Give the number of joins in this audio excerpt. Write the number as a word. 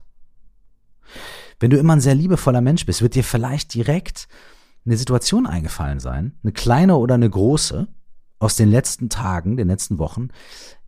zero